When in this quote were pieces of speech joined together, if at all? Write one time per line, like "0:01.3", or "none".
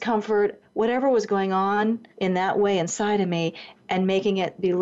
0:02.1